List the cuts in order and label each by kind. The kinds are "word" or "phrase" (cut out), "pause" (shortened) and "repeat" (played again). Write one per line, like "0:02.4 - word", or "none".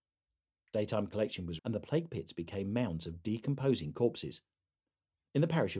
0:01.6 - word